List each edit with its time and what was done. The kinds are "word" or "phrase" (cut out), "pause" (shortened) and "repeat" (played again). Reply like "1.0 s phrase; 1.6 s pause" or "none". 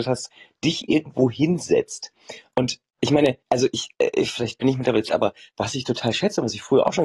3.4 s pause; 5.1 s word